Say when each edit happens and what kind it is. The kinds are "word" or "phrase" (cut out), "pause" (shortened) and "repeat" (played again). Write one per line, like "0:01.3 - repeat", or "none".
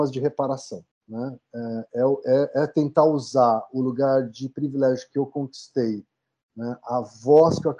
0:00.9 - pause